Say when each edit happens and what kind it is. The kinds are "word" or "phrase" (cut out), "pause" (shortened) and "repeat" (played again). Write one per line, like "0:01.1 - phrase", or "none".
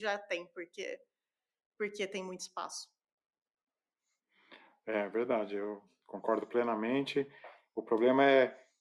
none